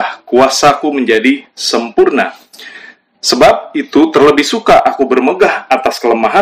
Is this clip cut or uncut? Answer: uncut